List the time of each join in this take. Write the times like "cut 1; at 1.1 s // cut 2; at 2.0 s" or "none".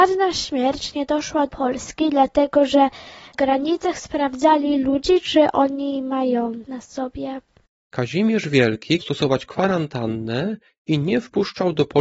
cut 1; at 1.5 s // cut 2; at 3.3 s // cut 3; at 6.7 s // cut 4; at 9.0 s